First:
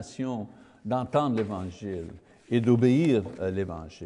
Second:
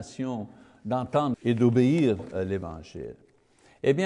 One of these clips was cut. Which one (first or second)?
second